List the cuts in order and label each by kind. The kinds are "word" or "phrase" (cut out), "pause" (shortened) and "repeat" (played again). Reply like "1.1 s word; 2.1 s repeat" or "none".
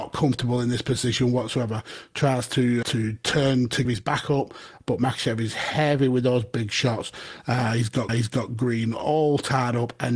2.8 s word; 3.8 s word; 8.1 s repeat